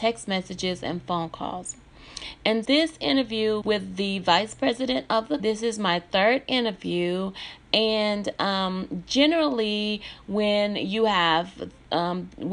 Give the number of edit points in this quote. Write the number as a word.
three